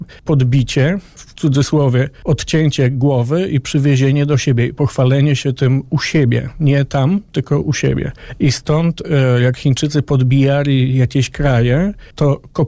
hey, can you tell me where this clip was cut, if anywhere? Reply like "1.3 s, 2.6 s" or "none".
none